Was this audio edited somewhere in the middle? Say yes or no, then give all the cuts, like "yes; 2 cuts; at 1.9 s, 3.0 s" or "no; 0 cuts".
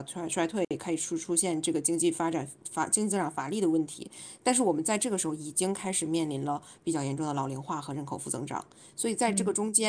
no; 0 cuts